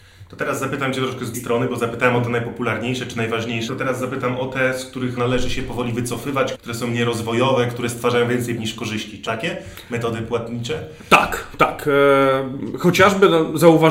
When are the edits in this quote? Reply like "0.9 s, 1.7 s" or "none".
1.3 s, 3.7 s, 5.2 s, 6.5 s, 8.6 s, 9.3 s